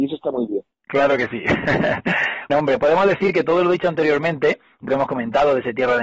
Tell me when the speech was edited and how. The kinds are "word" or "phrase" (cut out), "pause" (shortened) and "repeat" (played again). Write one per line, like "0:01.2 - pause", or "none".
0:02.5 - word
0:04.9 - word